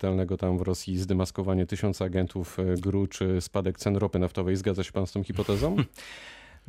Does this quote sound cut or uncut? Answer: uncut